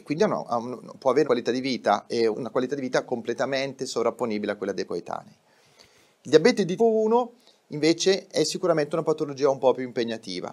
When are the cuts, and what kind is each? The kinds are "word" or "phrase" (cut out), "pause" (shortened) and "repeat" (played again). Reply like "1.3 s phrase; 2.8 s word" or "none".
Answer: 1.2 s word; 2.3 s word; 4.8 s word; 6.8 s word

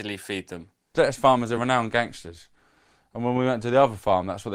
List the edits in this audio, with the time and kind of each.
none

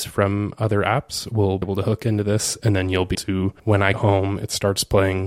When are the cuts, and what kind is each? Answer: 1.6 s word; 3.1 s word; 3.6 s pause; 3.9 s word

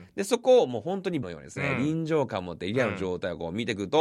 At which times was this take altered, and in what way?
1.2 s word

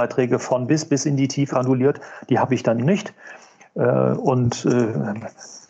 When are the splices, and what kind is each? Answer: 1.5 s word; 2.8 s word

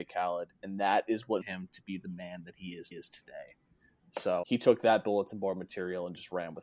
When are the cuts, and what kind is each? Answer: 1.4 s word; 2.9 s repeat; 4.4 s word

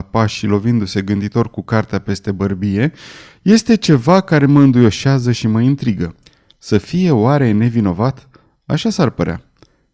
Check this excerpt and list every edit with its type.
none

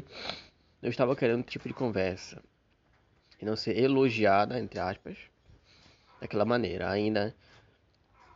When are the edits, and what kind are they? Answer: 1.5 s word

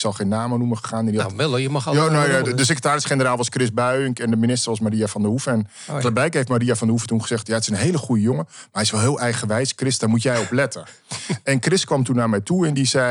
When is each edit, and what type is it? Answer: 2.4 s word

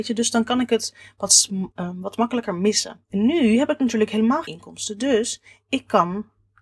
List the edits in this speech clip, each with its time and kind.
1.7 s phrase; 3.0 s pause; 4.4 s word

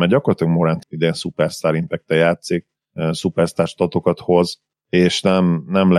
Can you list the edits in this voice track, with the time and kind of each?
none

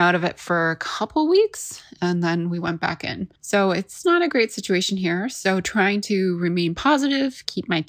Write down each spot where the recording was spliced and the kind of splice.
3.4 s pause; 4.0 s word

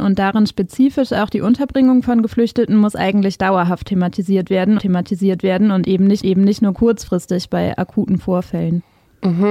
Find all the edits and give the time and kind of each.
4.8 s repeat; 6.2 s repeat

